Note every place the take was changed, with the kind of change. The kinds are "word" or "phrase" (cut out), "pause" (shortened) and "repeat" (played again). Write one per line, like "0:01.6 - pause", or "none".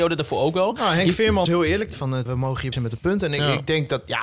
0:01.5 - word
0:01.9 - word
0:02.3 - word
0:02.7 - word